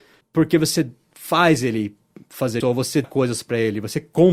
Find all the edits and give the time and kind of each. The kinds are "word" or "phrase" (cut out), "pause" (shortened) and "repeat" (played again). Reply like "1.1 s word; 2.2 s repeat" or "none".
2.6 s word; 3.0 s word